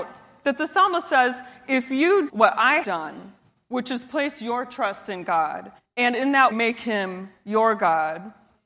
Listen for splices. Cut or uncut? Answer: cut